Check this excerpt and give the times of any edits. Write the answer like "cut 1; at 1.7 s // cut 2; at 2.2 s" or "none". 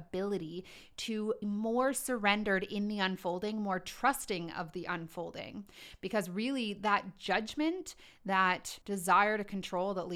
cut 1; at 1.4 s // cut 2; at 8.8 s